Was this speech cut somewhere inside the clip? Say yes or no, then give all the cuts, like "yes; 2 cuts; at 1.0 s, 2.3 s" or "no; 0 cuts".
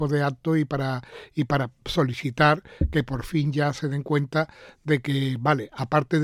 no; 0 cuts